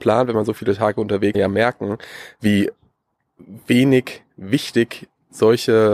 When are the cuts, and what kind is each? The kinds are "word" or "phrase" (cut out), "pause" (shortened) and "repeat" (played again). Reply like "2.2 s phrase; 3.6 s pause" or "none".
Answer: 1.3 s phrase